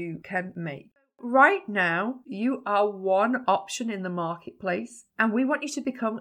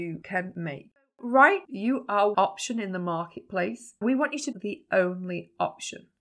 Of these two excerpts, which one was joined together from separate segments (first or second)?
second